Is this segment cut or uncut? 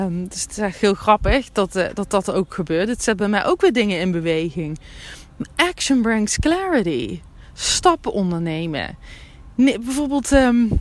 uncut